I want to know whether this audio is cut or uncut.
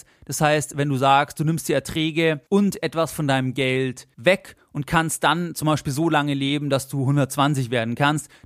cut